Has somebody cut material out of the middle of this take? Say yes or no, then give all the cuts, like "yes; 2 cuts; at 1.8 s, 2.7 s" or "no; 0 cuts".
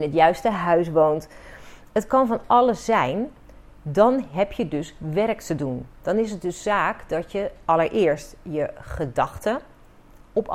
no; 0 cuts